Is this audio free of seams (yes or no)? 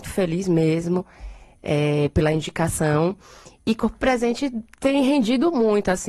yes